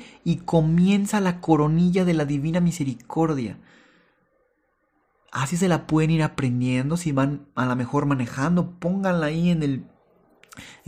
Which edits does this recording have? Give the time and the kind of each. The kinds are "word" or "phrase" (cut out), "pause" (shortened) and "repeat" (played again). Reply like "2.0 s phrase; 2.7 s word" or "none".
none